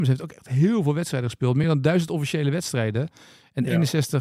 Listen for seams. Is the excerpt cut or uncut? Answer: uncut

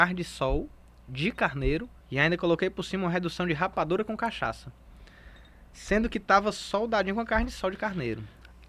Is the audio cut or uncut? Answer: cut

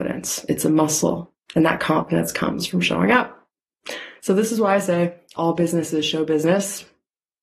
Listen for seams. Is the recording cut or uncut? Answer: cut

